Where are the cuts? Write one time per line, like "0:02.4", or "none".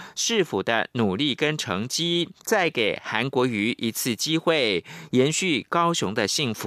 0:02.4